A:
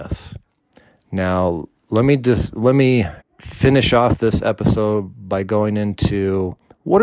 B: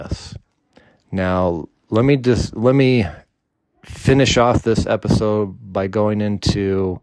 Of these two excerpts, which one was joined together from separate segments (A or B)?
A